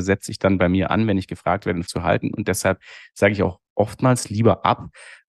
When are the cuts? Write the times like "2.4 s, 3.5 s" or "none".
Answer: 1.9 s